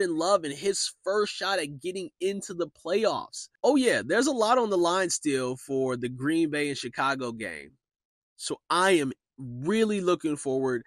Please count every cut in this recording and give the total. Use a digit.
0